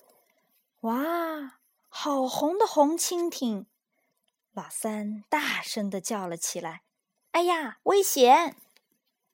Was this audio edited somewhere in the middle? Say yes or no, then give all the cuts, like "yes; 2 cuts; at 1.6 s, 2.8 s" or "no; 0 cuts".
yes; 2 cuts; at 6.9 s, 7.8 s